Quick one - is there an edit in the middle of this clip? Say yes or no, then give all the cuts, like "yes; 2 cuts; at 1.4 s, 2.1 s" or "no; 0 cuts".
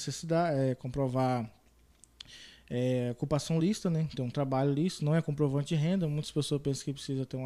no; 0 cuts